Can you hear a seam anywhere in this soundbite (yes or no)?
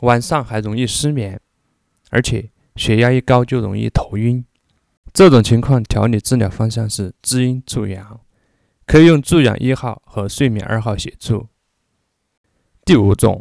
no